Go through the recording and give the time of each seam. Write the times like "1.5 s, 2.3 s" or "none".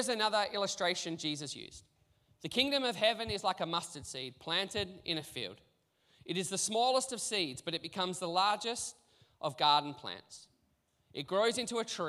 none